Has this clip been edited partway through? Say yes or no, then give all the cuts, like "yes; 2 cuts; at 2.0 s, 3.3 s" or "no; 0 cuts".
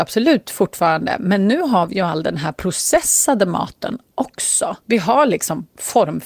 yes; 1 cut; at 4.8 s